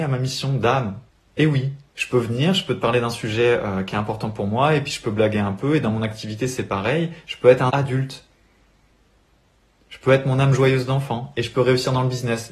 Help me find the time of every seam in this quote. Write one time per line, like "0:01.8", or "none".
0:01.1
0:01.9
0:07.7